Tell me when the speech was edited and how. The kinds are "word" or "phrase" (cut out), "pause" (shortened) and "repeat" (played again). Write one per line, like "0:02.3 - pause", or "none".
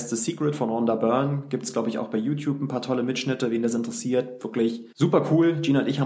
0:04.9 - pause